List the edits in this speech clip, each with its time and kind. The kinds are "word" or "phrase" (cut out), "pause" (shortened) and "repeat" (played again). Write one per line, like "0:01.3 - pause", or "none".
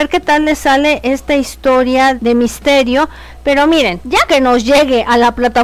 0:02.2 - word
0:04.3 - word

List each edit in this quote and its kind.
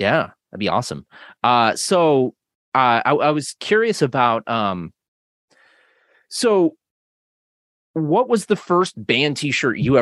none

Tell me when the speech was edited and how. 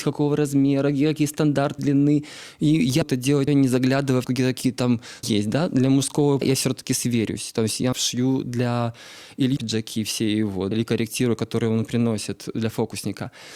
0:01.8 - word
0:03.0 - word
0:03.5 - word
0:04.3 - word
0:05.2 - word
0:06.4 - word
0:07.9 - word
0:09.6 - word
0:10.7 - word

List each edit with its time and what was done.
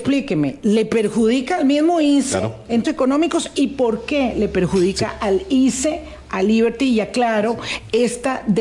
0:02.8 - word

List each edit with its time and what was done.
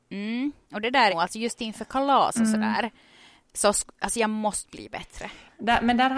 0:01.1 - phrase

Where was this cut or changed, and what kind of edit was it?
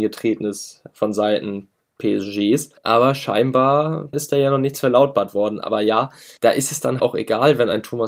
0:02.8 - pause
0:04.1 - word
0:06.4 - pause
0:07.0 - word

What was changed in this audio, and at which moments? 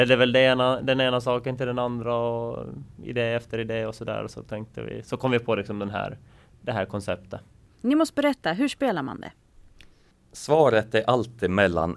none

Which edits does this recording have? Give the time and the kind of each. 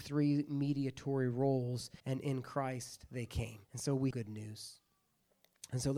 0:02.0 - pause
0:03.6 - pause
0:04.1 - word

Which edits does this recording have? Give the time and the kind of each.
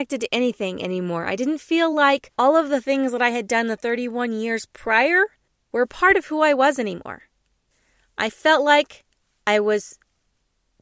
none

